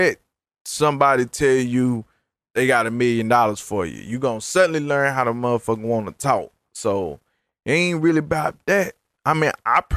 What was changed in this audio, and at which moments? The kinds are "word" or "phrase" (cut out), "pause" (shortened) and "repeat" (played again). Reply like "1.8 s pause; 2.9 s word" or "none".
none